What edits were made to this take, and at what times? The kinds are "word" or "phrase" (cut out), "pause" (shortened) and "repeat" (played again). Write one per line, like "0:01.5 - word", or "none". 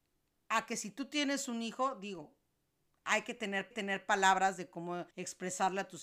0:03.7 - repeat
0:05.1 - pause